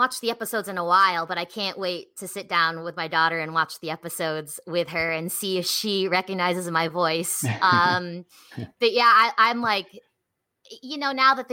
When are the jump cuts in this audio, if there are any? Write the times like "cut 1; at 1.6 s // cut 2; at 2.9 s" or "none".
none